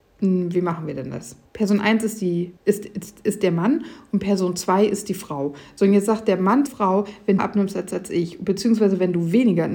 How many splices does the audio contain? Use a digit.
5